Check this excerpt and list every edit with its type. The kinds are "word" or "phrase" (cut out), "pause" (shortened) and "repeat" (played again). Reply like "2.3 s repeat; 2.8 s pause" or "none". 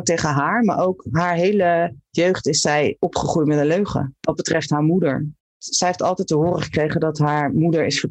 none